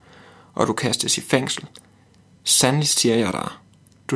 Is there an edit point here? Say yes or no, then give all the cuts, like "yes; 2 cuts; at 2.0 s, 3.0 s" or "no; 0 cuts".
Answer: no; 0 cuts